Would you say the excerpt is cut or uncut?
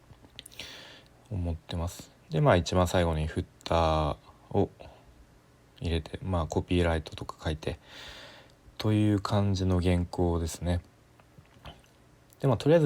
uncut